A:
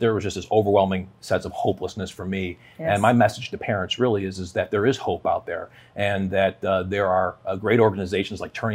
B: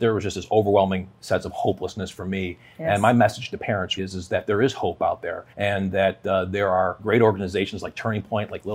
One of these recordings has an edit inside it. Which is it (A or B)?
B